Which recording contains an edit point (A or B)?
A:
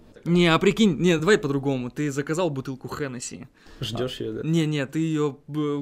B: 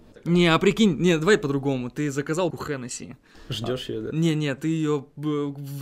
B